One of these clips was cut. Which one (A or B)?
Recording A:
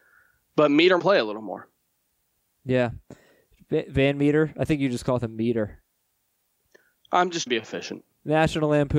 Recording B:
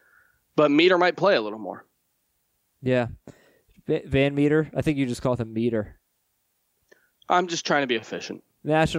A